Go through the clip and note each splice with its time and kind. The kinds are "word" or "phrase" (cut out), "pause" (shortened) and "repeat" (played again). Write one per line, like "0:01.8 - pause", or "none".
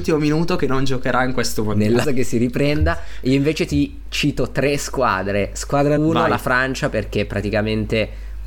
0:02.0 - word
0:06.0 - word